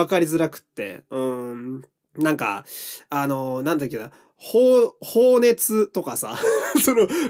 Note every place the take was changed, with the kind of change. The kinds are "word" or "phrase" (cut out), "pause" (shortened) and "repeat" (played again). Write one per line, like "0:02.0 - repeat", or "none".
0:01.9 - pause